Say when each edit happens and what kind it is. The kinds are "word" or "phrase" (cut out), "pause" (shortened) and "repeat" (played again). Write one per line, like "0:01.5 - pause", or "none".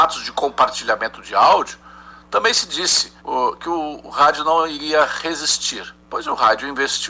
0:03.2 - pause
0:06.0 - pause